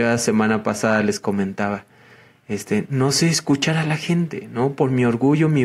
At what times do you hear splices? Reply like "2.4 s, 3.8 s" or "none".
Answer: none